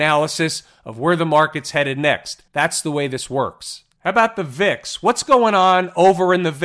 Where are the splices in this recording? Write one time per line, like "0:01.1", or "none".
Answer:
0:02.5